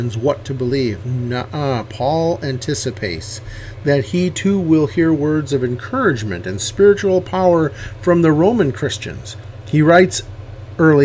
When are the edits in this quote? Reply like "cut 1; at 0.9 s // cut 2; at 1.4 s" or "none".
none